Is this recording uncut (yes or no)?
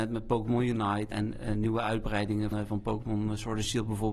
no